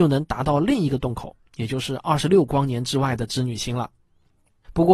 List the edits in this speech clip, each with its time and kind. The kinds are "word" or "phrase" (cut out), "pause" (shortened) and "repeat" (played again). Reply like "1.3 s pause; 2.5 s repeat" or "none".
none